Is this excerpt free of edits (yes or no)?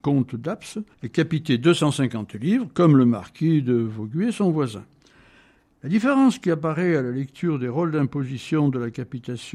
no